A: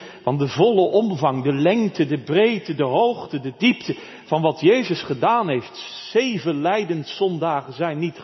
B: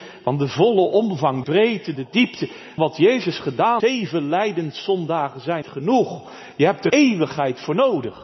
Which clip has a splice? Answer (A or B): B